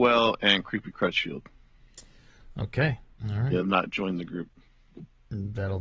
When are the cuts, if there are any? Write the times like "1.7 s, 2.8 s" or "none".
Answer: 3.1 s, 3.6 s